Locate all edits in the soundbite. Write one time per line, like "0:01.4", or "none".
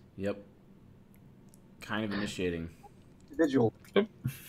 none

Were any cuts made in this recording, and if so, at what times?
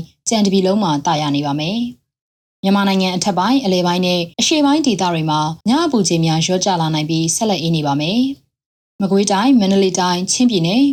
0:04.3
0:05.6

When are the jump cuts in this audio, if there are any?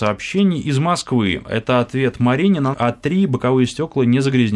0:02.7

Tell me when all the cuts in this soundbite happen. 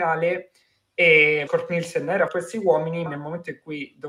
0:01.5
0:02.3
0:03.1

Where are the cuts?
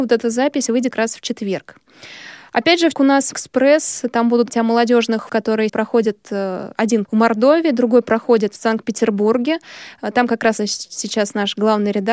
0:00.9
0:02.9
0:03.3
0:04.5
0:05.3
0:05.7
0:07.0
0:10.6

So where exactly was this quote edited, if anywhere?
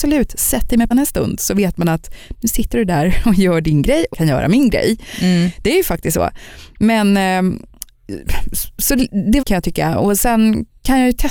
0:00.9
0:04.1
0:09.4

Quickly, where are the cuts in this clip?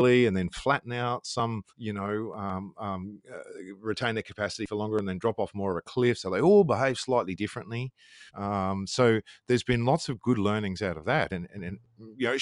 0:01.7
0:08.3

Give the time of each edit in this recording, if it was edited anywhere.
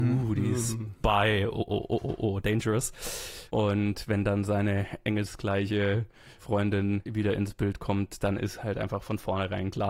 none

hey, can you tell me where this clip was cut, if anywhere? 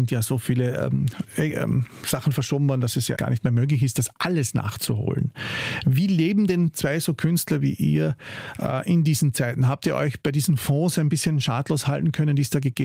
0:03.2

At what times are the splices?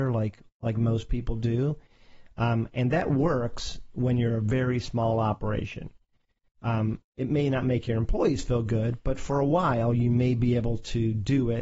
none

